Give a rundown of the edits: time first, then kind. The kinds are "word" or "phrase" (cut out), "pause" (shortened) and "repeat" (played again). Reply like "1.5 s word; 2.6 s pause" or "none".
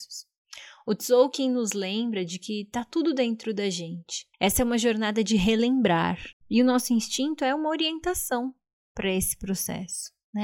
4.3 s pause